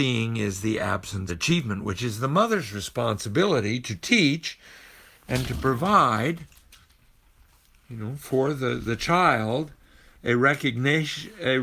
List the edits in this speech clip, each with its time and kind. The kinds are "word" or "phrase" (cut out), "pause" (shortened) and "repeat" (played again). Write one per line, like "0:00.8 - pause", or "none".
0:01.3 - phrase

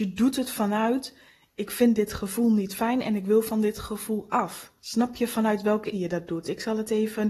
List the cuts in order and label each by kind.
0:04.8 - pause
0:05.9 - word

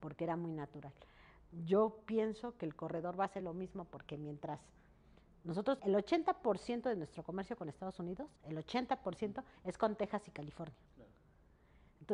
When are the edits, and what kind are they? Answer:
0:03.4 - word
0:05.8 - word
0:08.4 - pause
0:09.6 - pause
0:10.8 - pause

